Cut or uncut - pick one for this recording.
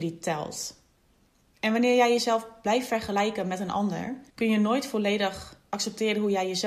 cut